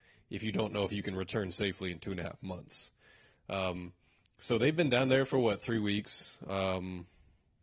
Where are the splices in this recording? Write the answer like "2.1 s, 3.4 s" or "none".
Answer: none